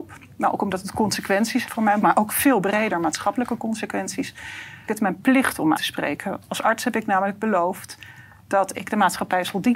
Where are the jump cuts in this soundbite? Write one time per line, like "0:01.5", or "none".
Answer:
0:01.7
0:02.0
0:04.9
0:05.8